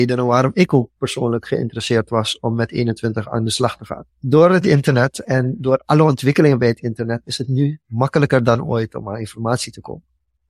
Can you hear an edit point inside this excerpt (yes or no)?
yes